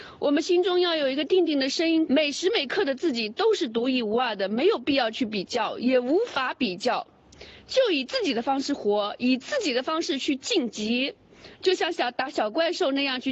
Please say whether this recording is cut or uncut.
cut